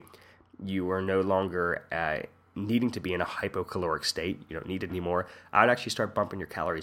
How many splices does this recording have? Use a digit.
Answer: 1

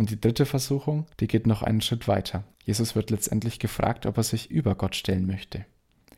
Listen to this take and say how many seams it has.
2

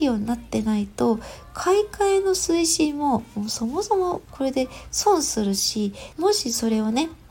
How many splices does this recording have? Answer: 1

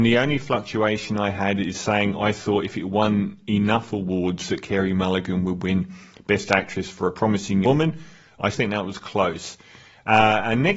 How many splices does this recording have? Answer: 2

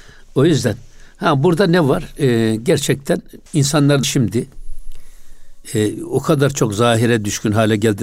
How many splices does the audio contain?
2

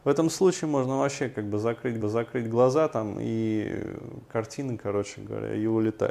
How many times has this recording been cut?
1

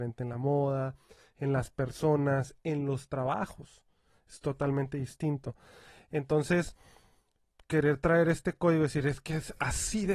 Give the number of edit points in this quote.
0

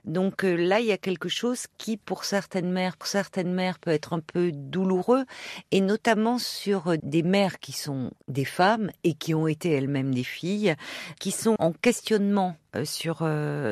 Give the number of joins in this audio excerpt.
5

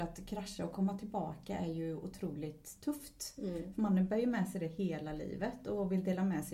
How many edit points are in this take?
0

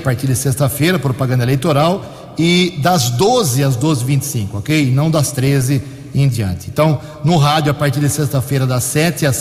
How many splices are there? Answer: 0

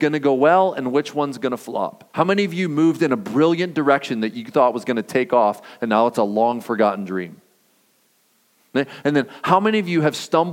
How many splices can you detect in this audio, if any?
1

